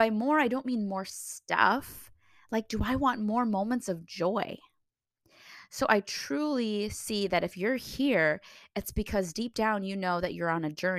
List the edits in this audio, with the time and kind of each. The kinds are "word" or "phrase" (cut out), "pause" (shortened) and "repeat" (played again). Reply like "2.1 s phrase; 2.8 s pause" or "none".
none